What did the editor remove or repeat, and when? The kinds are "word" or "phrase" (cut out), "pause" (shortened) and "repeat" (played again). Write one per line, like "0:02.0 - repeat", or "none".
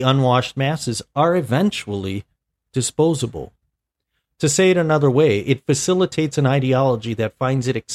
none

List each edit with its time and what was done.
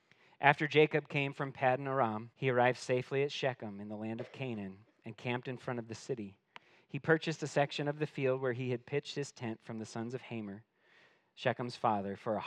0:02.3 - pause

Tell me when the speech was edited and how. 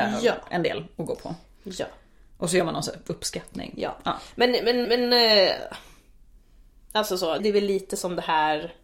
0:04.8 - repeat
0:07.4 - word

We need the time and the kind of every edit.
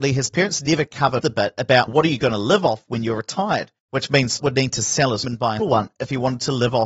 0:01.2 - word
0:01.9 - word
0:03.8 - pause
0:04.4 - word
0:05.2 - word
0:05.6 - word

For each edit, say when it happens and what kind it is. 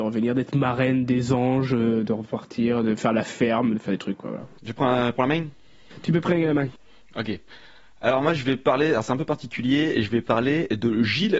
none

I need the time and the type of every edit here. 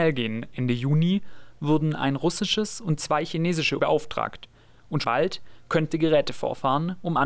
0:03.8 - word
0:05.0 - word
0:05.9 - word

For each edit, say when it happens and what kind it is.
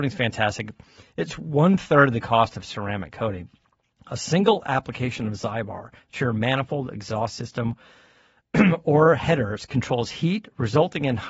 none

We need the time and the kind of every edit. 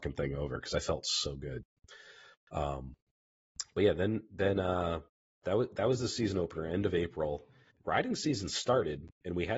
0:07.7 - word

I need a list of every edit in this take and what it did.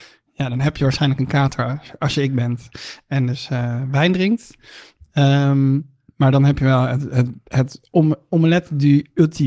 none

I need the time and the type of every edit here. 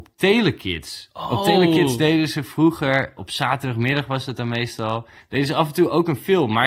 0:03.2 - word

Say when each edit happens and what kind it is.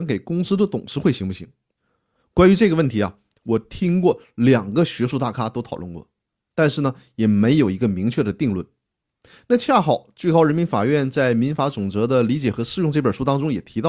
none

